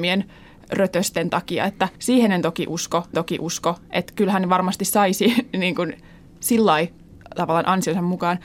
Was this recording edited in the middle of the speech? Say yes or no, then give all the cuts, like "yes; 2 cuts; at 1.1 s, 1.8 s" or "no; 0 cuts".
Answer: yes; 2 cuts; at 2.0 s, 3.1 s